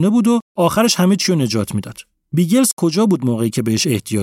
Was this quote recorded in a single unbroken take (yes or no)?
yes